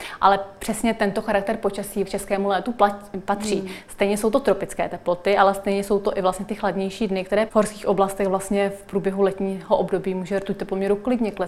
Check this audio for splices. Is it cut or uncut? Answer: cut